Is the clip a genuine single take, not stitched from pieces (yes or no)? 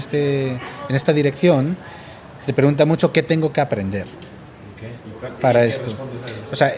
yes